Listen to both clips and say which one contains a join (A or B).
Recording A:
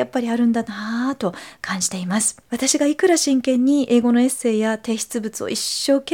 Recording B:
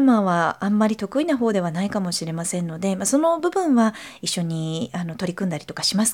A